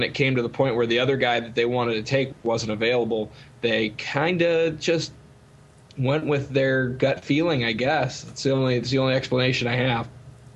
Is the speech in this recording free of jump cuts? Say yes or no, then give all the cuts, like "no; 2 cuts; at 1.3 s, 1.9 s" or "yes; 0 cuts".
yes; 0 cuts